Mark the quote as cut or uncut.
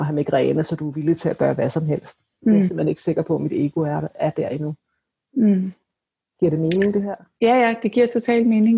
uncut